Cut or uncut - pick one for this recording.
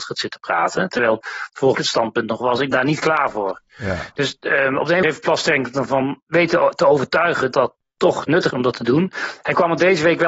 cut